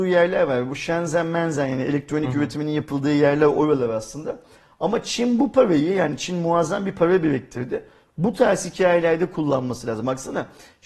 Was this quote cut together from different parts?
no; 0 cuts

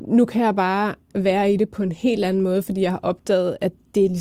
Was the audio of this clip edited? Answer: no; 0 cuts

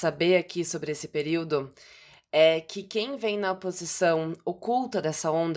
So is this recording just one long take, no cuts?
yes; 0 cuts

